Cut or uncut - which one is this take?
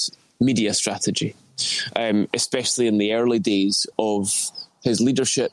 uncut